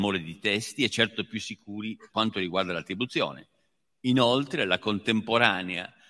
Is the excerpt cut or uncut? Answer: cut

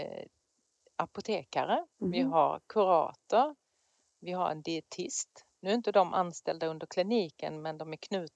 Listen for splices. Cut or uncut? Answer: cut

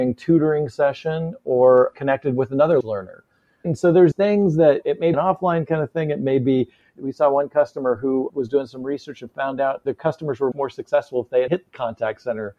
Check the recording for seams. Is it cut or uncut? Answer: cut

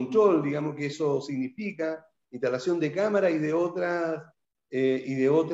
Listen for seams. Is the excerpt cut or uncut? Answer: uncut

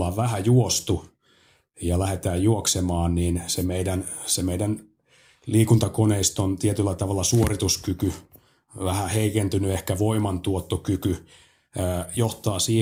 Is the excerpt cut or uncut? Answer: uncut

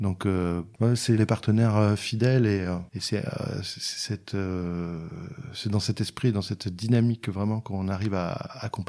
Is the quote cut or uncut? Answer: cut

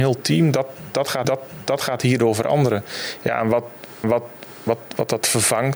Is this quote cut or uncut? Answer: cut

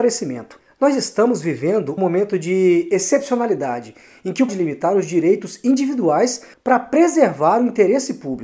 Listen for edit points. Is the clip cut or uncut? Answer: cut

